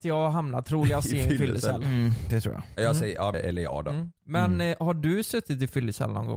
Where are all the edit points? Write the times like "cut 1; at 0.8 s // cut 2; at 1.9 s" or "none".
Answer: cut 1; at 3.3 s // cut 2; at 4.2 s